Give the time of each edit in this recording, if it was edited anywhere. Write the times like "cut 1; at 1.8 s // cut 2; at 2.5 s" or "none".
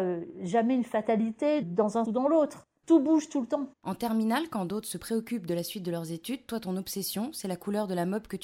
cut 1; at 1.6 s // cut 2; at 2.0 s // cut 3; at 3.7 s